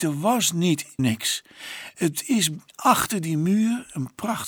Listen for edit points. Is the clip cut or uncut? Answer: cut